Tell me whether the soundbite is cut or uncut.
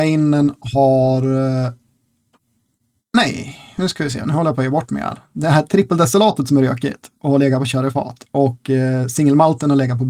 cut